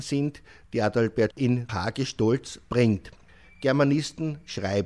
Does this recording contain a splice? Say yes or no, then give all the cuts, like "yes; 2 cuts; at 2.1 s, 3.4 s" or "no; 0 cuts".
yes; 2 cuts; at 1.3 s, 1.7 s